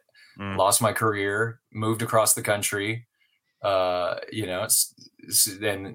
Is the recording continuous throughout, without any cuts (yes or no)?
yes